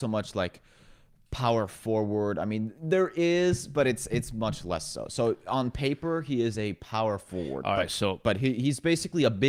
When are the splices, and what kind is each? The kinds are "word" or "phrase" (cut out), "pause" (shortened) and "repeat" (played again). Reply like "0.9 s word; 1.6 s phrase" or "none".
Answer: none